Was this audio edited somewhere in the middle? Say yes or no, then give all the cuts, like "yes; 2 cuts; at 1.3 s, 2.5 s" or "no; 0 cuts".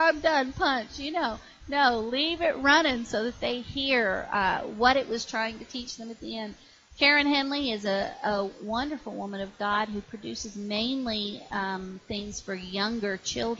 no; 0 cuts